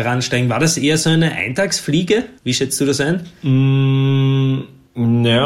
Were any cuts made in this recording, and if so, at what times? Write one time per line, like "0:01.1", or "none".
0:02.4
0:03.4